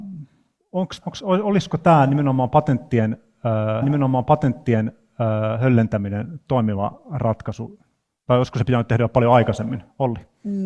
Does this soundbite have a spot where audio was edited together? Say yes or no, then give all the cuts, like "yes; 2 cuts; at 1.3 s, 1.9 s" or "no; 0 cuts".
yes; 2 cuts; at 1.0 s, 3.8 s